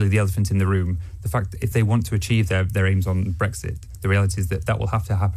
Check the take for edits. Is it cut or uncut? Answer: uncut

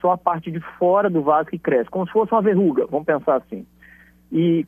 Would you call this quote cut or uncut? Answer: uncut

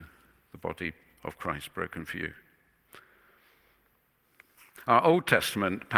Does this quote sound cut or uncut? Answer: uncut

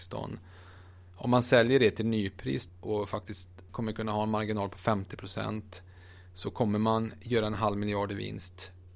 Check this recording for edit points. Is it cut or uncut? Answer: cut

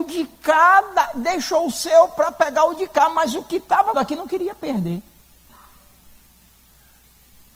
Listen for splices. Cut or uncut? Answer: cut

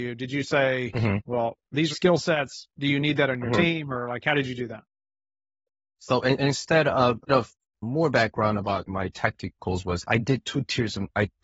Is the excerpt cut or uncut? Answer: cut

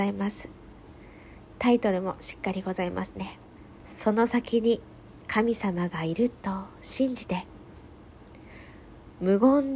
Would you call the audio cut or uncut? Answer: cut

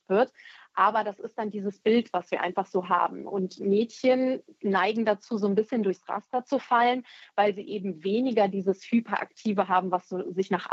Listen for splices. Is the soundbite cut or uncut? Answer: uncut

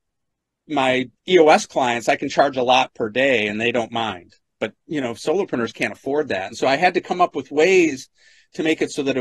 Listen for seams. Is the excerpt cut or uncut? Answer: cut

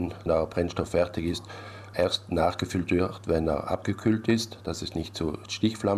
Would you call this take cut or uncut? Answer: uncut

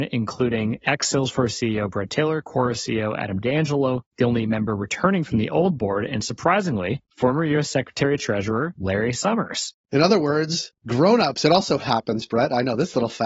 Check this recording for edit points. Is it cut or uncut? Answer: uncut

